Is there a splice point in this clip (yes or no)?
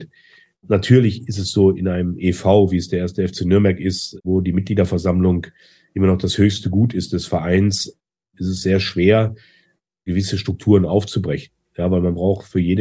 no